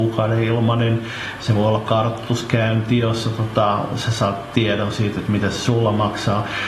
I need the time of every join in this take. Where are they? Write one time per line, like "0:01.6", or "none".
none